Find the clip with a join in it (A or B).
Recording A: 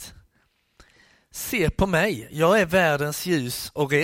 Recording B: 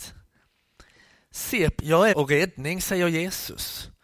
B